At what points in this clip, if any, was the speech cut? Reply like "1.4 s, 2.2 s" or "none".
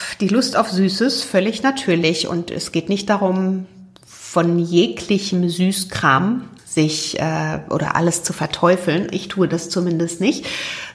none